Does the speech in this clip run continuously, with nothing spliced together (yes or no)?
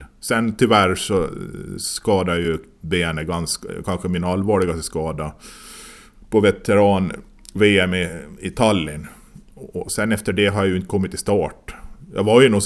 yes